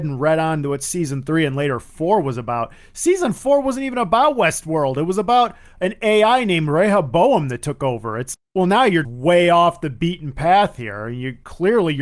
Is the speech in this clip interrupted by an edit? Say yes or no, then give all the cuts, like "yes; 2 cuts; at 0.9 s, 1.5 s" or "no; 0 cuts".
yes; 2 cuts; at 8.3 s, 9.0 s